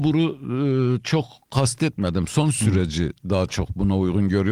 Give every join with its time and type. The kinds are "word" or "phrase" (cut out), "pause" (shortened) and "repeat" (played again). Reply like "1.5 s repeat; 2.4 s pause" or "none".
none